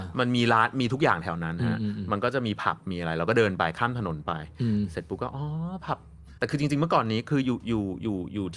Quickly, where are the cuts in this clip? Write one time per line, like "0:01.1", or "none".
0:06.4